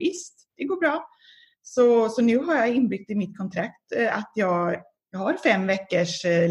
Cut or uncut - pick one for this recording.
uncut